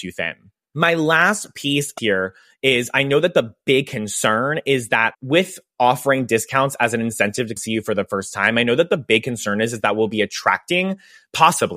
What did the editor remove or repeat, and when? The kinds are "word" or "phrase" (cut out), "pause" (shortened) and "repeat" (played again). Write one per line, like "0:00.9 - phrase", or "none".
0:02.0 - word
0:05.1 - word
0:07.6 - word